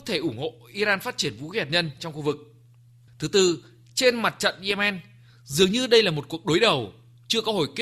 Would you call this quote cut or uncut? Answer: uncut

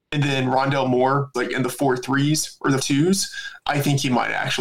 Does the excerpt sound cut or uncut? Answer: cut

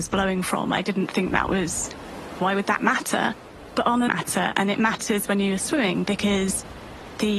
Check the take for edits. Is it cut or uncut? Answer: cut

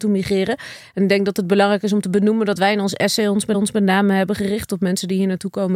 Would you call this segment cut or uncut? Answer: cut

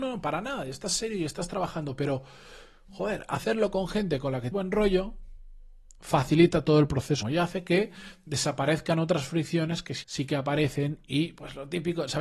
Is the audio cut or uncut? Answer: cut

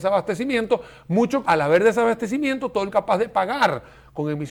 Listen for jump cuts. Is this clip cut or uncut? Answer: cut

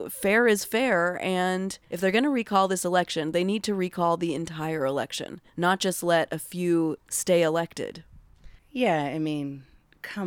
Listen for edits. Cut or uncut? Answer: cut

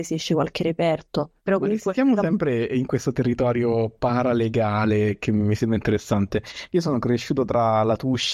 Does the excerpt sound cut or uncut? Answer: cut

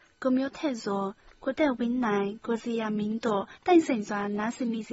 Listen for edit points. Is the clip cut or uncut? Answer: cut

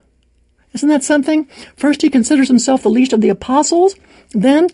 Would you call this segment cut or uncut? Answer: uncut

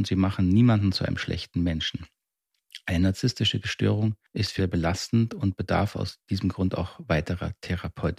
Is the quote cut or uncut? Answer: cut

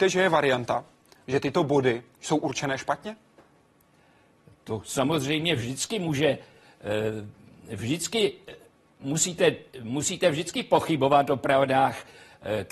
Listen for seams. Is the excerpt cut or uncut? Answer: uncut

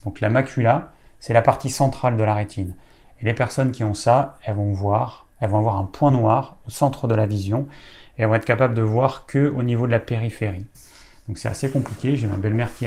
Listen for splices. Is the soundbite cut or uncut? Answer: uncut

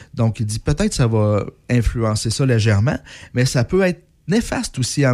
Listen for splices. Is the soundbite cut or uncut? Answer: uncut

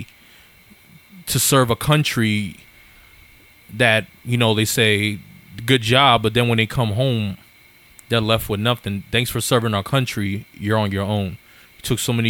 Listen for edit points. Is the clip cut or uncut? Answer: uncut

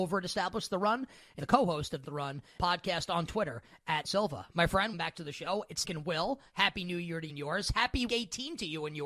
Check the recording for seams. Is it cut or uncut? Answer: cut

